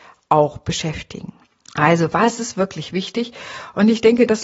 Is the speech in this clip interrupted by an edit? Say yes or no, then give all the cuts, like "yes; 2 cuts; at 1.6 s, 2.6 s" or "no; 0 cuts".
yes; 1 cut; at 1.4 s